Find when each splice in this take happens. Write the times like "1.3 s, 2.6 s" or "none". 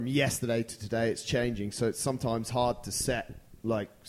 none